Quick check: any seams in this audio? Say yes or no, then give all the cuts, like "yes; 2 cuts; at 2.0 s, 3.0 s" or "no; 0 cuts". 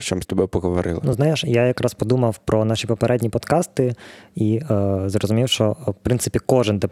no; 0 cuts